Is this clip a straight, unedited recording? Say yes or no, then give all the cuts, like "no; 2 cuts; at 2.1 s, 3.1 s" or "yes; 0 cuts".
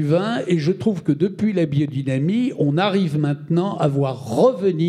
yes; 0 cuts